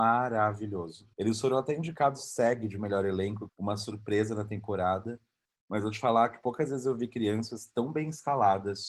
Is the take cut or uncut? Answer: cut